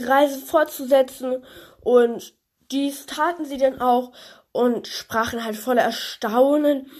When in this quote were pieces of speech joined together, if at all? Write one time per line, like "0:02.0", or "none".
none